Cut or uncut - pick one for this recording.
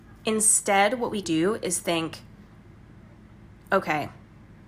cut